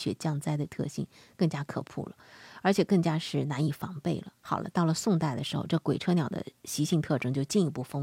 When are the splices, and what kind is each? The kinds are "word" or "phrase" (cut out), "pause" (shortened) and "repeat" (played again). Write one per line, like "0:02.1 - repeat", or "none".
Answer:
0:04.4 - pause